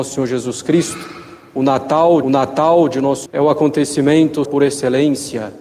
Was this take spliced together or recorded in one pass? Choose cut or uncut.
cut